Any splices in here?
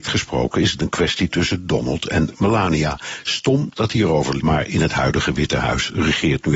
yes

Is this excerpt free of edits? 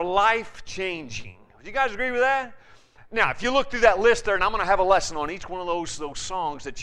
yes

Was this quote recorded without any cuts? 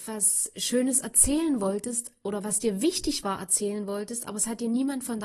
yes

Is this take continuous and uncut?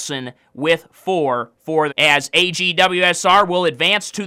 no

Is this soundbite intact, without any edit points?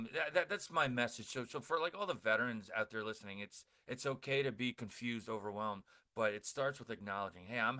yes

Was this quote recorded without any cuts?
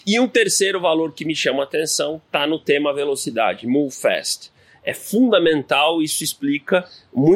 yes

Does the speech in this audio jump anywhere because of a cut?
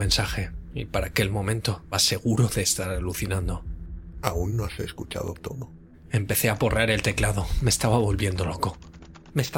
yes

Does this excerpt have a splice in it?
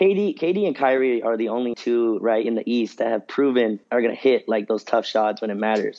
yes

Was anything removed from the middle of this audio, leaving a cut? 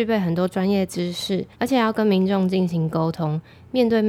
yes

